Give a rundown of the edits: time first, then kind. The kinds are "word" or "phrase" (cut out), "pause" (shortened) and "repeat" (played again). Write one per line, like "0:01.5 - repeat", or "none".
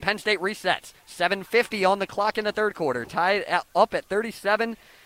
0:01.0 - pause